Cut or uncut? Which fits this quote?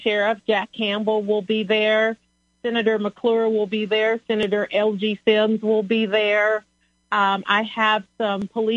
uncut